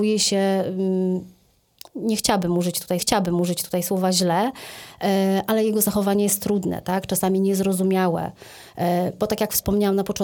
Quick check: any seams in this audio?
yes; 1 cut; at 3.0 s

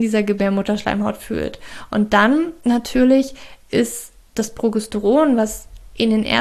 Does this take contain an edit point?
no; 0 cuts

